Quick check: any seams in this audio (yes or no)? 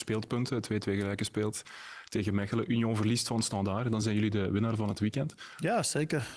no